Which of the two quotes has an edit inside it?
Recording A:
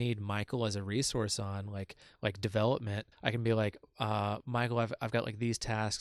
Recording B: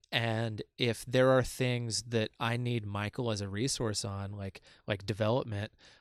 A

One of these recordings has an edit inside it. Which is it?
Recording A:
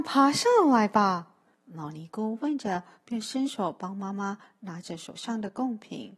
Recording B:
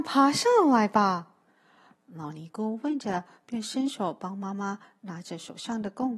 A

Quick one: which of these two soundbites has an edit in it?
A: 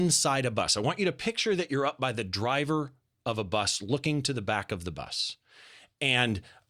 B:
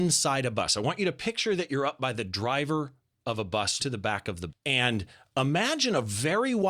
B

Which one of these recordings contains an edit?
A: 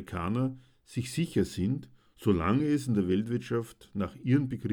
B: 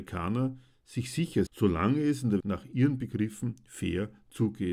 B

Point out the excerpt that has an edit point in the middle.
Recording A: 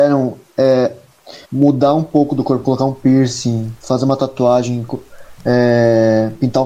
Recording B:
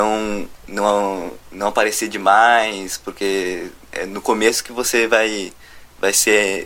A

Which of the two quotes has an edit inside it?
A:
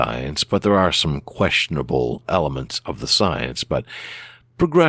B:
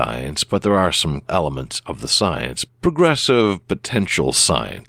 B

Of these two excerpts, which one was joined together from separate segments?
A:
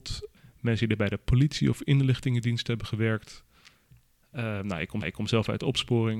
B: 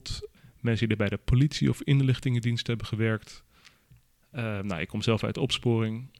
A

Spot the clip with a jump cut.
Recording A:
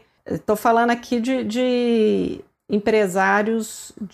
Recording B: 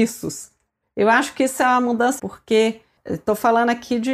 B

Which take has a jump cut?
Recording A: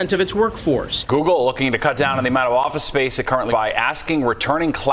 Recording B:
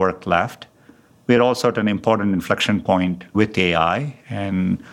A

